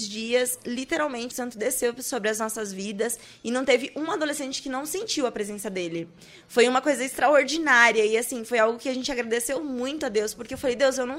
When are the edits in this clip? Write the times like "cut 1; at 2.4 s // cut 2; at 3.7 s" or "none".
cut 1; at 1.3 s